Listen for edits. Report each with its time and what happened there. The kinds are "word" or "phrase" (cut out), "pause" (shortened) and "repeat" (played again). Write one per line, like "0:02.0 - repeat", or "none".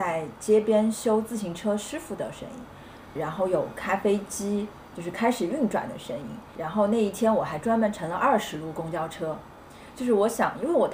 0:03.2 - word